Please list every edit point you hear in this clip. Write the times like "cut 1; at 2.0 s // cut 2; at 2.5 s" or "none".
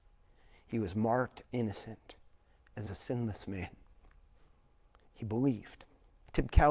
cut 1; at 1.4 s // cut 2; at 2.9 s